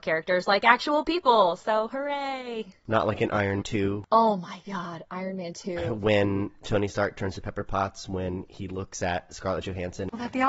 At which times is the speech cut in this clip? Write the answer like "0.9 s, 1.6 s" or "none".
3.6 s